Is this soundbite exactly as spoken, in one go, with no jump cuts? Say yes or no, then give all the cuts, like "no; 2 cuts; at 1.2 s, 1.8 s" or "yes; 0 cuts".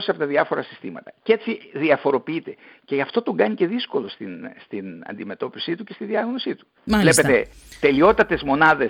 yes; 0 cuts